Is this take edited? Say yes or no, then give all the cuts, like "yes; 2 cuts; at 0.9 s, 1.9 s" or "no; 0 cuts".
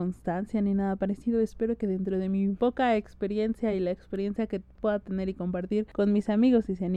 no; 0 cuts